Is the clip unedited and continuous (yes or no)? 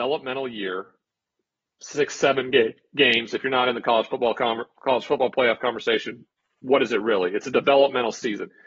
yes